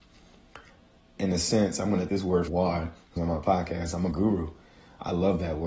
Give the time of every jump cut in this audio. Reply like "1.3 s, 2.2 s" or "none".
1.2 s, 2.1 s, 2.5 s, 3.2 s, 4.1 s